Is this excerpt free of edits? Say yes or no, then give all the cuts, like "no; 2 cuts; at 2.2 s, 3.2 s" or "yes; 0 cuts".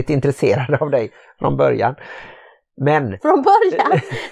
yes; 0 cuts